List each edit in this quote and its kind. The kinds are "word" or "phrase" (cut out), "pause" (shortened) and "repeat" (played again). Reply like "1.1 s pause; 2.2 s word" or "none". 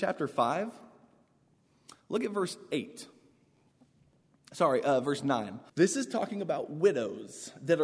5.7 s pause

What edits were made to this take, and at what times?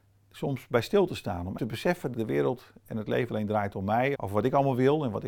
1.6 s word; 2.1 s word; 3.3 s word; 4.1 s word

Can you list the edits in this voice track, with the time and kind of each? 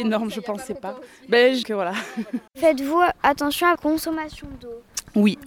1.6 s phrase; 2.5 s pause; 3.8 s word

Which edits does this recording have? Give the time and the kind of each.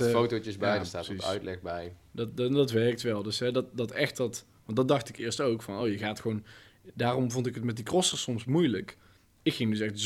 none

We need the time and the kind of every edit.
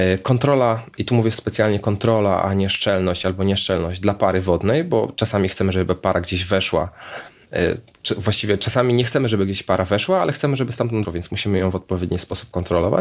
11.0 s word

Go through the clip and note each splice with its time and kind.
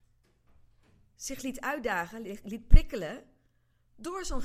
none

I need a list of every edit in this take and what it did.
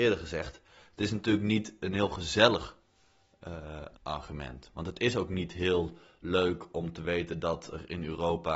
4.0 s pause

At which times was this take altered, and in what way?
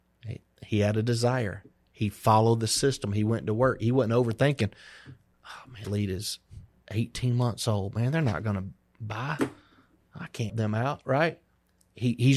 5.8 s word; 10.5 s word

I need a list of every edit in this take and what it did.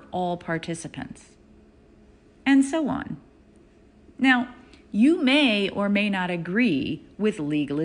none

